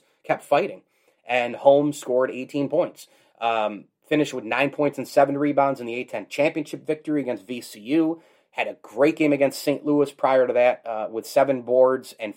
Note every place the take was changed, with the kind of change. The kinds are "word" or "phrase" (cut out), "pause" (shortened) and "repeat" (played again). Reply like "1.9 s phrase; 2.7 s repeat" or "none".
none